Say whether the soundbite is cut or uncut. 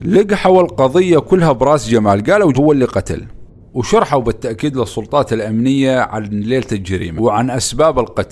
cut